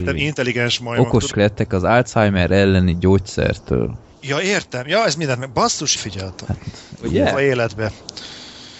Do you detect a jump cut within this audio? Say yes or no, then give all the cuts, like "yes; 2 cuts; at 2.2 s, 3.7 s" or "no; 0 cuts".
yes; 2 cuts; at 1.3 s, 6.0 s